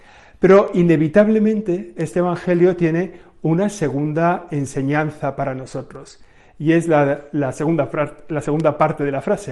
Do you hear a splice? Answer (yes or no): no